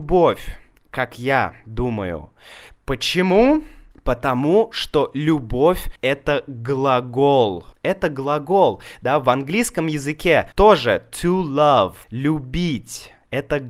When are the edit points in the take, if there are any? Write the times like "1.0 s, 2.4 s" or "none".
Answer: 3.9 s, 6.0 s, 7.7 s, 10.5 s, 12.0 s